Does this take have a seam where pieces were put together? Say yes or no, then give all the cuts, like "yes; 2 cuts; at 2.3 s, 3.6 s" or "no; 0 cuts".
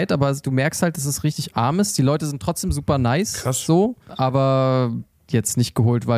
no; 0 cuts